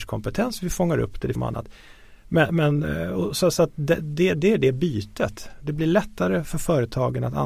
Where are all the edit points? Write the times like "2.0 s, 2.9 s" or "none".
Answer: 1.4 s